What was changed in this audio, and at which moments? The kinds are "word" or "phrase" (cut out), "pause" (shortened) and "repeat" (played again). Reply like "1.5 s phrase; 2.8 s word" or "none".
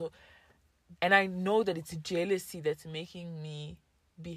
1.0 s word